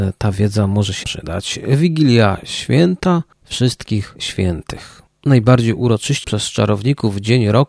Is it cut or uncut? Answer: cut